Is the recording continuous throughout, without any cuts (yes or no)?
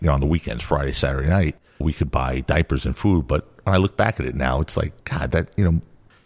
no